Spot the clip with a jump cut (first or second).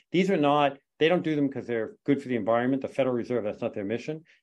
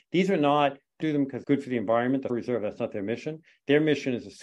second